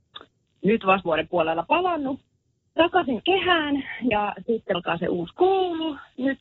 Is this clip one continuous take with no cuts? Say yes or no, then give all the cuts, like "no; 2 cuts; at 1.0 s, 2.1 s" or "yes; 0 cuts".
no; 5 cuts; at 1.1 s, 2.8 s, 3.2 s, 4.1 s, 4.7 s